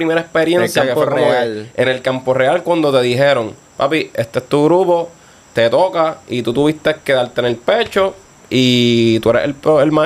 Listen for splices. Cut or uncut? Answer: uncut